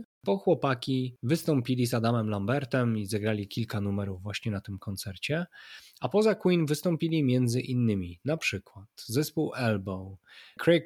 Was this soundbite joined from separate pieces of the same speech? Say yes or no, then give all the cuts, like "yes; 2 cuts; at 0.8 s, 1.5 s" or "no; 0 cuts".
no; 0 cuts